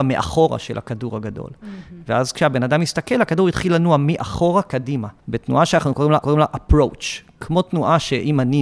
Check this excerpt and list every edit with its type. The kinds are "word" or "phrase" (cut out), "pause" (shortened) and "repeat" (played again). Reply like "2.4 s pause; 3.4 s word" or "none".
5.2 s pause; 6.2 s repeat